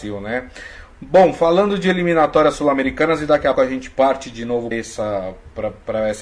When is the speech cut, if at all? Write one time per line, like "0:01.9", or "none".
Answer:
0:03.5
0:04.7